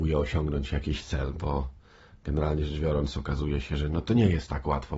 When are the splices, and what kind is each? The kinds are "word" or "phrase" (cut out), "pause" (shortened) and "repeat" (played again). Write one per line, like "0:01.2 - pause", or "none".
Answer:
none